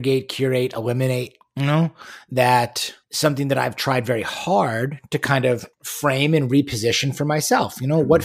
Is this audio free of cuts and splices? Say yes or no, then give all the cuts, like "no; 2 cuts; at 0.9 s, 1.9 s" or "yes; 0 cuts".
no; 2 cuts; at 3.0 s, 5.7 s